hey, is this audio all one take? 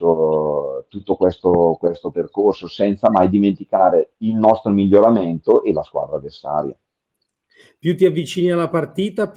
yes; 0 cuts

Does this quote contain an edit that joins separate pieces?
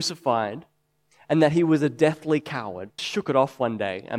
yes; 1 cut; at 3.0 s

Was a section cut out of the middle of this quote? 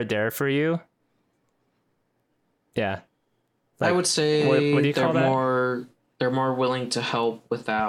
no; 0 cuts

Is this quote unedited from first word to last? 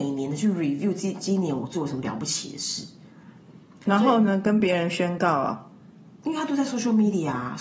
yes; 0 cuts

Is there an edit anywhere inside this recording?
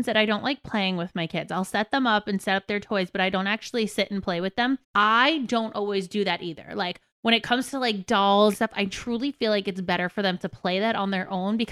yes; 2 cuts; at 4.8 s, 8.5 s

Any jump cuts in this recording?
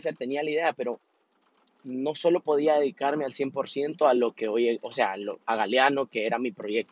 no; 0 cuts

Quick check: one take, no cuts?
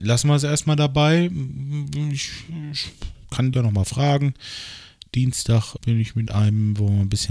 no; 3 cuts; at 3.5 s, 5.8 s, 6.3 s

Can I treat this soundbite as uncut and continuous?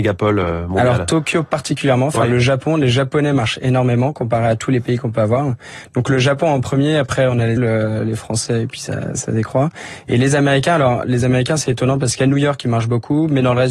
no; 1 cut; at 7.6 s

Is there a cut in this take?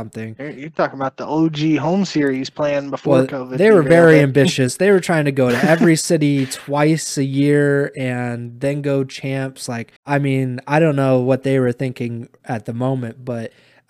yes; 1 cut; at 10.0 s

